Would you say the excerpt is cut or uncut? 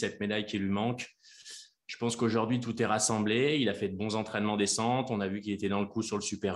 uncut